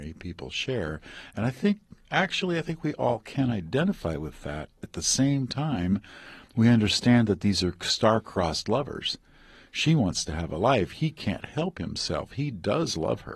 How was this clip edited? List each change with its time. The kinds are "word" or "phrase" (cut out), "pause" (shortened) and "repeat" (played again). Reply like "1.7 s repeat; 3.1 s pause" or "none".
none